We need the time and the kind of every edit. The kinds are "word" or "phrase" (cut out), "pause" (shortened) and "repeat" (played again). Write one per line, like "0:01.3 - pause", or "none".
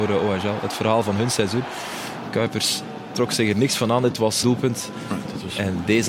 0:04.4 - word